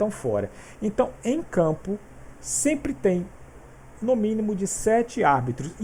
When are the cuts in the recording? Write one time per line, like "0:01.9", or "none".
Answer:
none